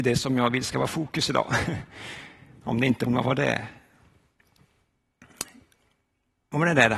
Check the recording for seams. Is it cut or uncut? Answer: cut